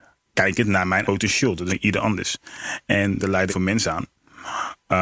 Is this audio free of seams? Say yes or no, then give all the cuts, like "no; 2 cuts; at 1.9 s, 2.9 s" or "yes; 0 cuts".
no; 4 cuts; at 1.0 s, 1.7 s, 3.2 s, 3.5 s